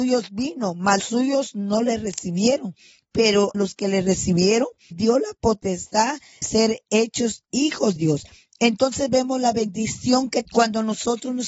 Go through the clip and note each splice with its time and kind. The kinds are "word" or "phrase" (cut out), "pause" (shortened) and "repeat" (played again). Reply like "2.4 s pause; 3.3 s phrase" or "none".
1.0 s word; 3.5 s word; 4.9 s word; 6.4 s word; 8.0 s word; 10.4 s word